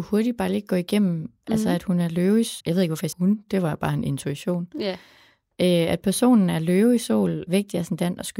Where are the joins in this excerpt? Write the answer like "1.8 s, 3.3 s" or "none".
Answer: 2.6 s, 3.1 s, 7.5 s

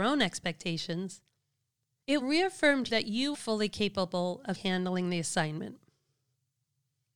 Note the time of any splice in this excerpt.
2.2 s, 2.9 s, 3.3 s, 4.5 s

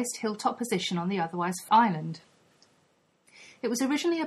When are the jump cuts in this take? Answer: 1.7 s

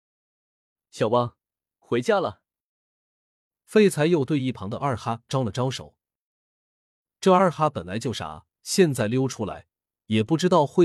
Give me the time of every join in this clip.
none

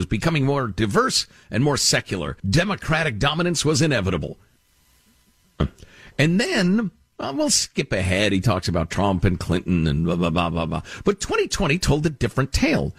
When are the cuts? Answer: 2.4 s

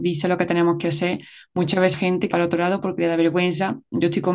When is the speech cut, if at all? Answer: 1.9 s, 2.3 s

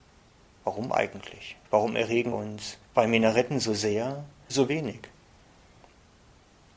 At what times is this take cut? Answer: 1.6 s, 2.3 s, 2.8 s, 4.5 s

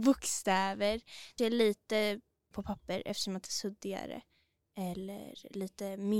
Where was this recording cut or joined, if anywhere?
1.4 s, 2.5 s, 3.4 s

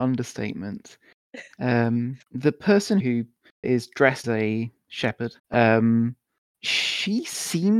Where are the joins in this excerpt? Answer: 2.2 s, 3.0 s, 3.6 s, 4.2 s, 5.4 s

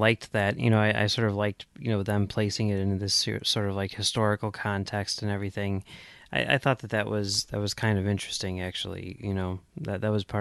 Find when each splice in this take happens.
none

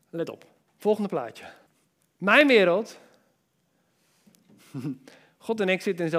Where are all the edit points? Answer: 1.7 s

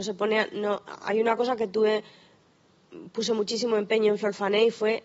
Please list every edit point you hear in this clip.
none

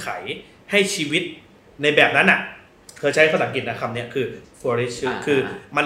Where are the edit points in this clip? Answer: 4.4 s

